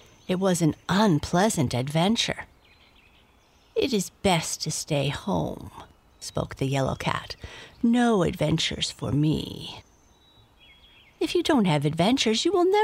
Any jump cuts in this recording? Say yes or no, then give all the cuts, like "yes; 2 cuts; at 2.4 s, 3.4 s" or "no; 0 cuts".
no; 0 cuts